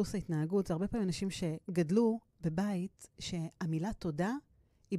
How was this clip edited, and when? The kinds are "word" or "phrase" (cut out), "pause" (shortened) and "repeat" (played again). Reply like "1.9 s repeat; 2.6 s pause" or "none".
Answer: none